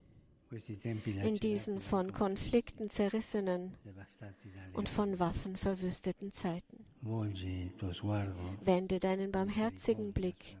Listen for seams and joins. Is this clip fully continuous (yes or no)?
no